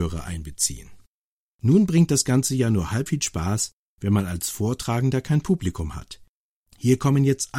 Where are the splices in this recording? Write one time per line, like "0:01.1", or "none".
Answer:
0:03.1